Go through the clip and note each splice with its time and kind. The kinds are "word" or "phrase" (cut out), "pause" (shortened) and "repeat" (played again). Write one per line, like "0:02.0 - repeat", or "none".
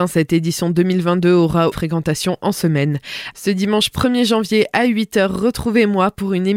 0:01.7 - phrase